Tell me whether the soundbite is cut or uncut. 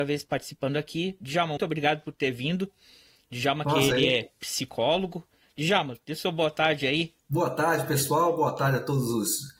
cut